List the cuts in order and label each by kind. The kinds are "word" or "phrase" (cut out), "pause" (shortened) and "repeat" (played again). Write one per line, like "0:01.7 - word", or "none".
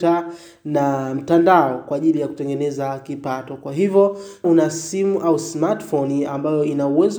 0:04.4 - word